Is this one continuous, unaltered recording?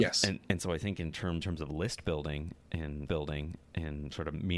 no; 2 cuts; at 1.4 s, 3.1 s

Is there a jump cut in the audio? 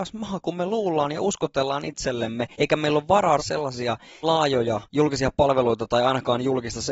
yes; 4 cuts; at 2.5 s, 3.4 s, 4.2 s, 4.9 s

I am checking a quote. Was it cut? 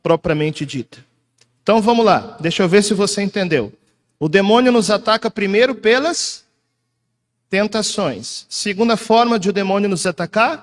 no; 0 cuts

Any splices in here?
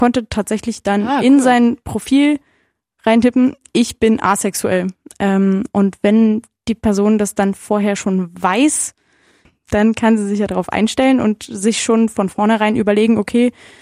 no; 0 cuts

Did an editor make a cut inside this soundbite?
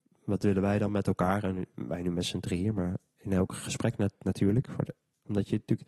no; 0 cuts

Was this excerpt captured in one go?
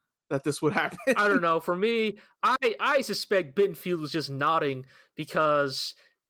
yes; 0 cuts

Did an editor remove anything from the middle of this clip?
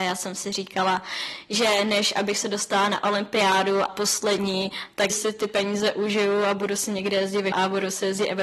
yes; 3 cuts; at 3.9 s, 5.1 s, 7.5 s

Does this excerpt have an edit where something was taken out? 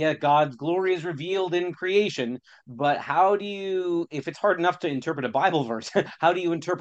no; 0 cuts

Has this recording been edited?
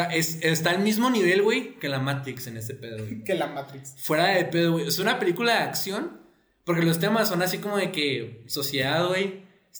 no; 0 cuts

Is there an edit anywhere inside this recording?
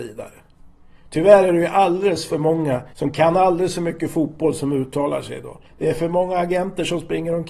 yes; 2 cuts; at 2.9 s, 5.7 s

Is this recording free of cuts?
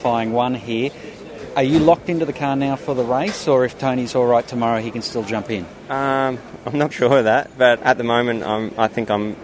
no; 2 cuts; at 6.9 s, 7.8 s

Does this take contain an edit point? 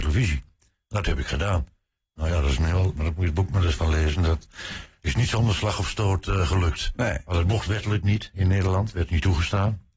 no; 0 cuts

